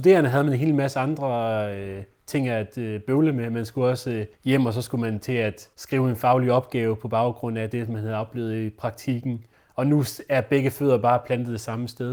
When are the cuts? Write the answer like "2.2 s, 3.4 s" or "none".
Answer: 4.3 s, 5.7 s, 9.5 s